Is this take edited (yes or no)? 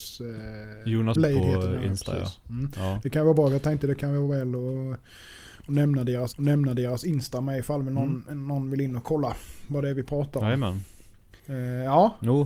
yes